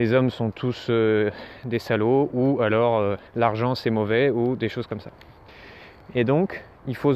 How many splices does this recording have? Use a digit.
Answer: 1